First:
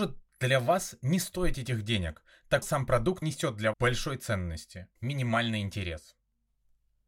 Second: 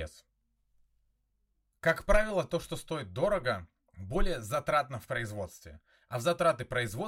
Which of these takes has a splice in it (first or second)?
first